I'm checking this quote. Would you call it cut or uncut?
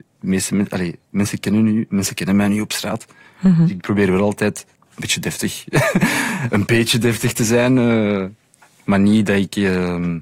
uncut